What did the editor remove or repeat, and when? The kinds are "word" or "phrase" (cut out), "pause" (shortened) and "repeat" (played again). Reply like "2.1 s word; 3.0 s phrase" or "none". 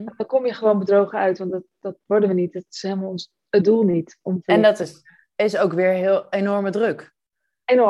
none